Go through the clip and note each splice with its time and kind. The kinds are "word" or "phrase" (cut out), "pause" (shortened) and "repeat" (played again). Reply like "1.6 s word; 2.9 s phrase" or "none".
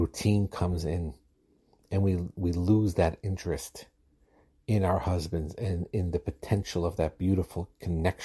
none